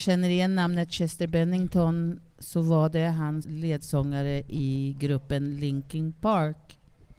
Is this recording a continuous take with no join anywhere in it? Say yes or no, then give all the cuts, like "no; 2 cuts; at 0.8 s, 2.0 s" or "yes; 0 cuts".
no; 1 cut; at 3.4 s